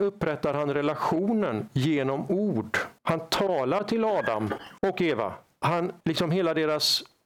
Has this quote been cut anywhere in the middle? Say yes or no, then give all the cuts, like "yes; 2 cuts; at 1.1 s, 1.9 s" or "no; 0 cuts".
yes; 3 cuts; at 3.0 s, 4.8 s, 6.0 s